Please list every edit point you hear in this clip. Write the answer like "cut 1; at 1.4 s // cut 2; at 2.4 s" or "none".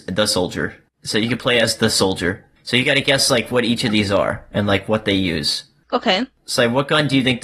none